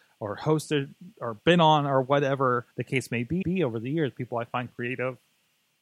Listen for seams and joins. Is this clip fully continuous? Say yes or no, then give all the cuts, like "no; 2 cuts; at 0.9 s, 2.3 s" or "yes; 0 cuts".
no; 2 cuts; at 2.7 s, 3.4 s